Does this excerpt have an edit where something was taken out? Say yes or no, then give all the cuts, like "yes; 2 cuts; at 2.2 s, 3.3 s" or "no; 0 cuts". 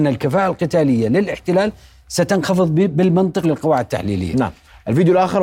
yes; 1 cut; at 3.4 s